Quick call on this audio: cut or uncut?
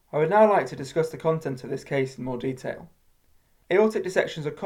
uncut